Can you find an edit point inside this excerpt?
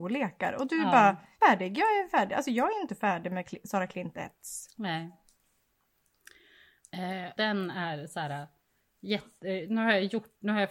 yes; 2 cuts; at 1.4 s, 7.4 s

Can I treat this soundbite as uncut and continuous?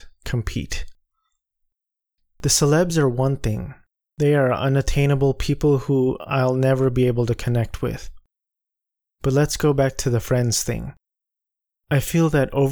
yes; 0 cuts

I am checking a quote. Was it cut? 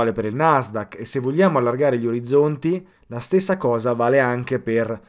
yes; 1 cut; at 2.9 s

